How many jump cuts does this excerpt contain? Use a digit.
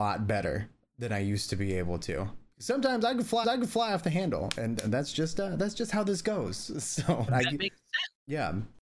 2